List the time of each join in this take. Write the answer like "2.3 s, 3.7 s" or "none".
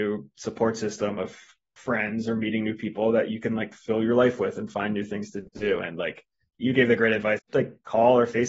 7.5 s

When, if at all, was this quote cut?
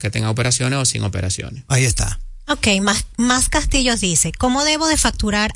none

